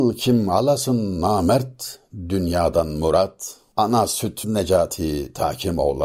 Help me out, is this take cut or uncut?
cut